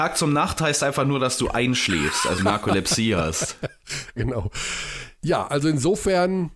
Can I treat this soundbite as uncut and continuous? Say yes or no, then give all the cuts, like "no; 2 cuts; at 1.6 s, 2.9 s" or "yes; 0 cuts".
no; 2 cuts; at 2.4 s, 4.2 s